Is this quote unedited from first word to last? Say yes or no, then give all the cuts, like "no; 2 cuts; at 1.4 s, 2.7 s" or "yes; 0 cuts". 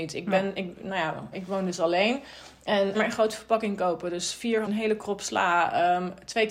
no; 3 cuts; at 1.3 s, 2.9 s, 4.6 s